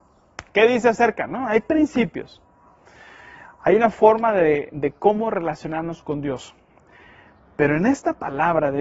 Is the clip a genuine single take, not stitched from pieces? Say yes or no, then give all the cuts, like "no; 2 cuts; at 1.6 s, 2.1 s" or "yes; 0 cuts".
yes; 0 cuts